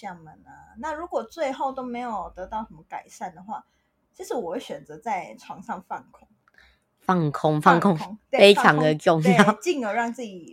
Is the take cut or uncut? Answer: uncut